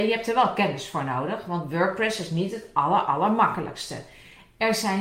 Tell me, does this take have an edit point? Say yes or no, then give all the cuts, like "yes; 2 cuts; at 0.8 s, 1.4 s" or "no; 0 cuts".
no; 0 cuts